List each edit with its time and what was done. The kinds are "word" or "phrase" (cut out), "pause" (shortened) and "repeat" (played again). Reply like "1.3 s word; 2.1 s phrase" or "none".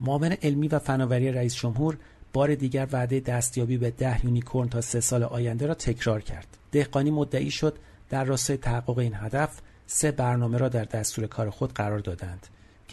6.6 s pause